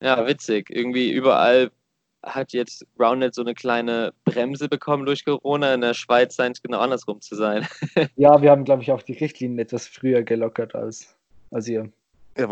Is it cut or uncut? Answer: uncut